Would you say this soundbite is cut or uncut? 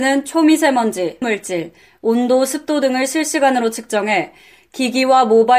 cut